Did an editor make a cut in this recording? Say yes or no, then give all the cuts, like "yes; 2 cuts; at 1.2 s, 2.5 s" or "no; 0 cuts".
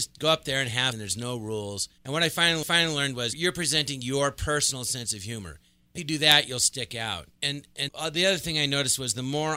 yes; 7 cuts; at 0.9 s, 2.0 s, 2.6 s, 3.3 s, 6.0 s, 7.3 s, 7.9 s